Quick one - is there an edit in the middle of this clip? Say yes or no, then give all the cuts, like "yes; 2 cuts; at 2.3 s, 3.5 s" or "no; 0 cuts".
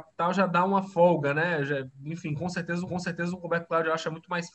yes; 1 cut; at 2.9 s